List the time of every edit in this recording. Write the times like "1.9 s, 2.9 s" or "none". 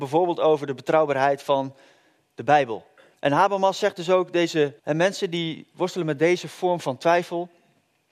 3.1 s, 4.8 s